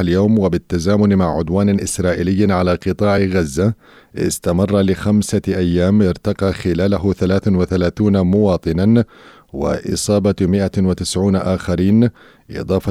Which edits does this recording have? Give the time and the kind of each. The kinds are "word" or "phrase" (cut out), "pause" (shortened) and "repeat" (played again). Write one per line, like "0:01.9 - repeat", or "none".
none